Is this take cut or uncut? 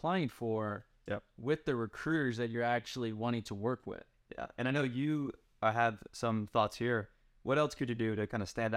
uncut